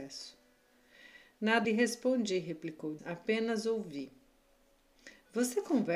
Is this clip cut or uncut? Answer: cut